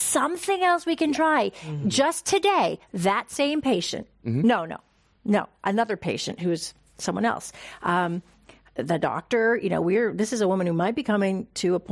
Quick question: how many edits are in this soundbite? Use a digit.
0